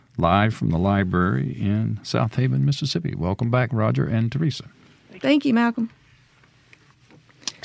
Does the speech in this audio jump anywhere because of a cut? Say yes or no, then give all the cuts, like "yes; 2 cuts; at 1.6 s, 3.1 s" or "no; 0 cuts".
no; 0 cuts